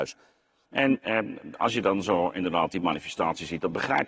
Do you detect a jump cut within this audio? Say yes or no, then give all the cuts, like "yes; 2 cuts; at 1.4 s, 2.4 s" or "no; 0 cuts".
no; 0 cuts